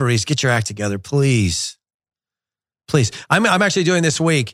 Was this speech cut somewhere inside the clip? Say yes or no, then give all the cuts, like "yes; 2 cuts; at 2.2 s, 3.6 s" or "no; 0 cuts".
no; 0 cuts